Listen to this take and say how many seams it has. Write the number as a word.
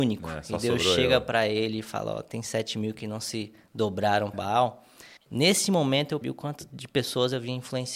three